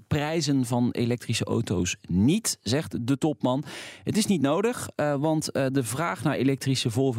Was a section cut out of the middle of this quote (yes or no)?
no